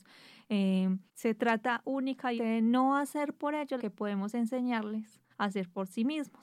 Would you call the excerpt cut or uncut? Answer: cut